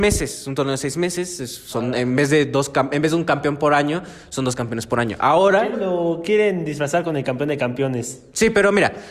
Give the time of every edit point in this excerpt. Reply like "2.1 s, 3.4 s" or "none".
5.7 s